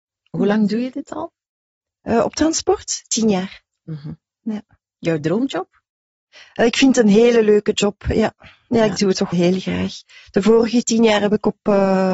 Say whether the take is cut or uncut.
cut